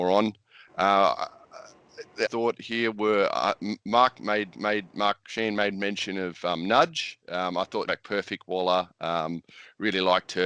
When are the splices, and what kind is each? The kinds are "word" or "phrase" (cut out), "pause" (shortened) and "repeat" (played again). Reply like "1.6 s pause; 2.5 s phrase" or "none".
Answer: 2.2 s phrase; 3.8 s pause; 4.5 s repeat; 7.9 s phrase